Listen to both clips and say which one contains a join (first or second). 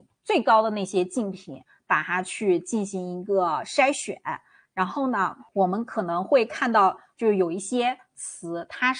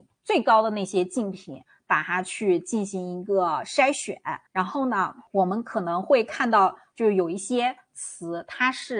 second